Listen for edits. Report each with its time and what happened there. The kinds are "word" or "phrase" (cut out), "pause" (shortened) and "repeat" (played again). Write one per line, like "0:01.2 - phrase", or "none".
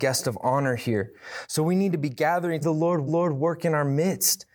0:02.6 - phrase
0:03.1 - repeat